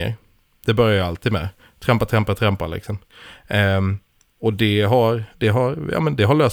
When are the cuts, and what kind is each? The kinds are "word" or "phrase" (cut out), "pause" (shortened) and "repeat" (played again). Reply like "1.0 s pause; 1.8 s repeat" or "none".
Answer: none